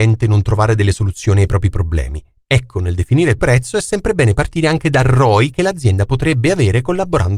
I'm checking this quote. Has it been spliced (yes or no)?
yes